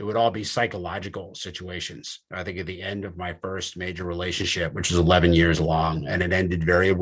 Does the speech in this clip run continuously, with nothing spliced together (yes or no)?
yes